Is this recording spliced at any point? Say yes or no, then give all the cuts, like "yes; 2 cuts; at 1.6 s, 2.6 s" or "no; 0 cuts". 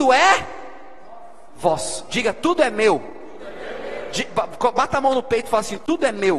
no; 0 cuts